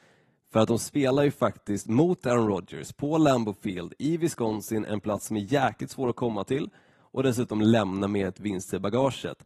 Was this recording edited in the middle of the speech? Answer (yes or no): no